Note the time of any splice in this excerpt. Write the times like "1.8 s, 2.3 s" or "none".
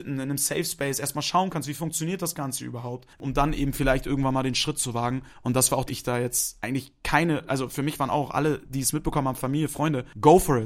5.3 s, 5.9 s